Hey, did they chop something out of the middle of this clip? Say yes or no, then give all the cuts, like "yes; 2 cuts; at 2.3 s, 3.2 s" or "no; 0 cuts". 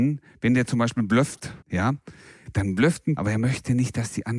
yes; 2 cuts; at 1.6 s, 3.2 s